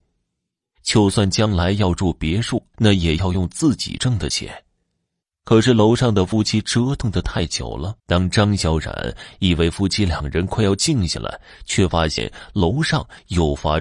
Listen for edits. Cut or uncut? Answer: cut